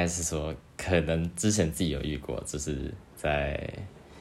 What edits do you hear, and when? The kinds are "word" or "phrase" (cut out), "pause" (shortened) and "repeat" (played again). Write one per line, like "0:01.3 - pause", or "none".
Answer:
0:03.1 - pause